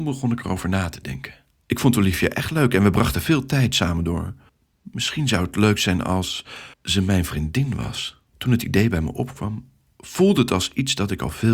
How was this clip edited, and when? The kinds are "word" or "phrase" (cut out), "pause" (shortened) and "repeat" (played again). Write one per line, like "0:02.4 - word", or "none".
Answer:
0:04.5 - pause
0:06.7 - pause
0:08.3 - pause